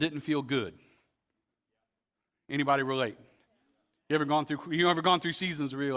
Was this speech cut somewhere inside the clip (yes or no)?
no